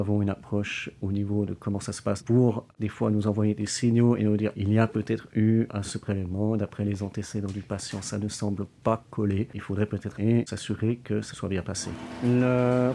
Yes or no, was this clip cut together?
yes